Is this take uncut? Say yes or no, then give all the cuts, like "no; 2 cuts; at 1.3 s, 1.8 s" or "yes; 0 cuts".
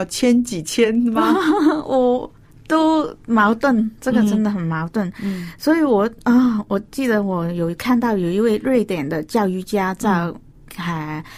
yes; 0 cuts